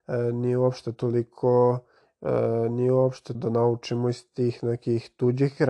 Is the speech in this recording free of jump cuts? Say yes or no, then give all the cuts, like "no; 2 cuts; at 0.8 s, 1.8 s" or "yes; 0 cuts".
no; 1 cut; at 3.3 s